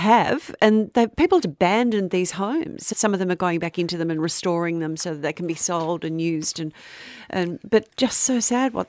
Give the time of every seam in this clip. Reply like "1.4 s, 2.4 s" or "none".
1.4 s, 2.9 s, 7.9 s